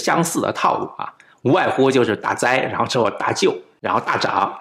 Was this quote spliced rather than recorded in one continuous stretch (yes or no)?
no